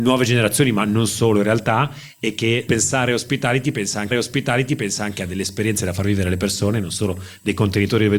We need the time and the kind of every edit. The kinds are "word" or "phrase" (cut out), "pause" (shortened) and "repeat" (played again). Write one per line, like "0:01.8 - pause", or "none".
0:02.7 - phrase
0:04.1 - repeat